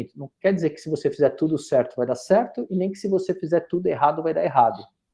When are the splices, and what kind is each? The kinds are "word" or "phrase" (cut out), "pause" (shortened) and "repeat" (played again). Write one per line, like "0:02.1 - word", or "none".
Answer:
none